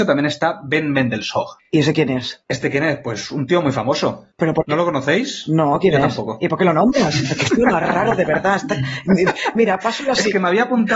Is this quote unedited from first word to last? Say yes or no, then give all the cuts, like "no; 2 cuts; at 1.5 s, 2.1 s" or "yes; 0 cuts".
yes; 0 cuts